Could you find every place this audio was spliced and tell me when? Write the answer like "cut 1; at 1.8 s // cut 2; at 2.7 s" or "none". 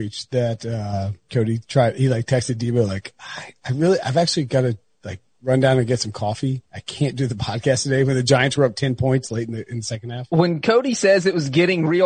cut 1; at 1.2 s // cut 2; at 6.7 s